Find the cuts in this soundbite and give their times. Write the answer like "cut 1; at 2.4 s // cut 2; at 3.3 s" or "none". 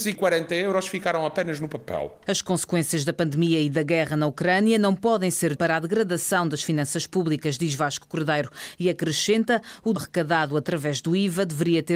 cut 1; at 5.6 s // cut 2; at 10.0 s

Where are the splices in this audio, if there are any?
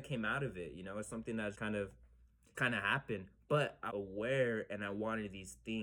cut 1; at 1.5 s // cut 2; at 2.5 s // cut 3; at 3.9 s

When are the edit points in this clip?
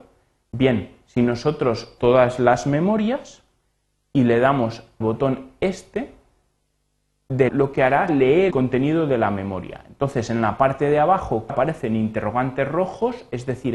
cut 1; at 2.0 s // cut 2; at 5.0 s // cut 3; at 7.5 s // cut 4; at 8.1 s // cut 5; at 8.5 s // cut 6; at 11.5 s

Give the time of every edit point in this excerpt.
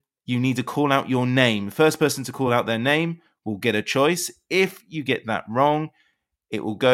none

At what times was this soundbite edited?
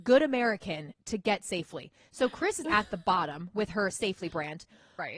cut 1; at 2.6 s

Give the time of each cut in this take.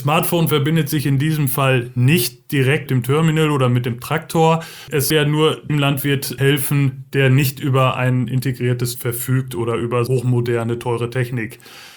cut 1; at 2.9 s // cut 2; at 5.1 s // cut 3; at 5.7 s // cut 4; at 8.9 s // cut 5; at 10.1 s

